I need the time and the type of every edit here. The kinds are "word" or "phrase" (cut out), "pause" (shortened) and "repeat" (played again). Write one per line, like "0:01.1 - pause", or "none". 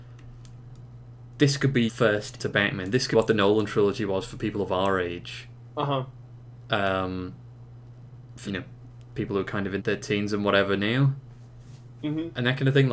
0:01.9 - word
0:02.4 - word
0:03.1 - word
0:08.4 - word
0:09.8 - word

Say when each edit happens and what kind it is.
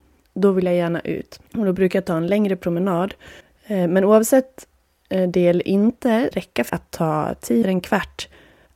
0:01.5 - pause
0:03.4 - pause
0:06.3 - phrase
0:06.7 - word
0:07.6 - word

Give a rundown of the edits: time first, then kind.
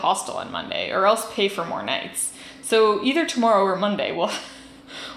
none

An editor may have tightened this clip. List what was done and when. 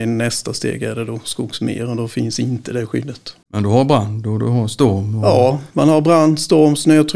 0:03.4 - pause

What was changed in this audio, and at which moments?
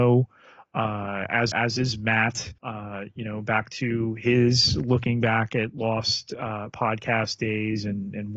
0:01.5 - word
0:02.6 - pause

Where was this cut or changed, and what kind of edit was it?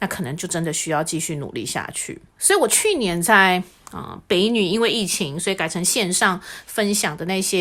0:02.3 - pause

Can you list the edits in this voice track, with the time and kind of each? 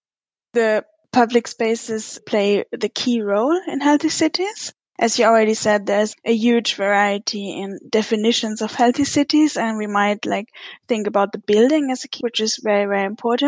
0:02.2 - word
0:06.1 - word
0:12.2 - word

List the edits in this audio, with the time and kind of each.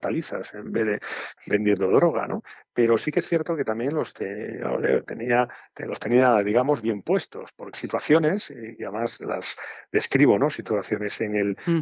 0:01.4 - word
0:07.7 - word
0:09.2 - word

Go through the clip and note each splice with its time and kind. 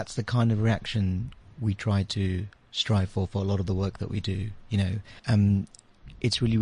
0:05.2 - pause

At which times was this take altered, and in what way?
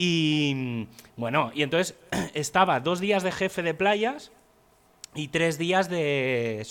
none

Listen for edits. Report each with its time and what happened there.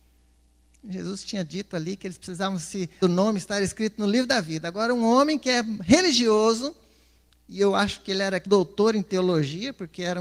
0:03.0 - phrase
0:08.5 - word

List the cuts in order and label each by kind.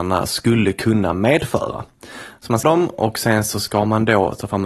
0:02.6 - word

